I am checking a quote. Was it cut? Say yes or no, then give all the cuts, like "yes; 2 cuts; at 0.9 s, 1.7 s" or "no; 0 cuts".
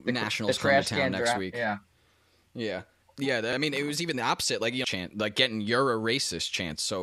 yes; 2 cuts; at 3.0 s, 4.8 s